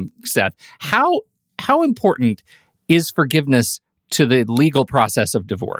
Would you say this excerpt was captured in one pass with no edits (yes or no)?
yes